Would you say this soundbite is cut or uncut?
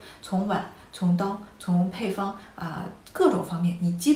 uncut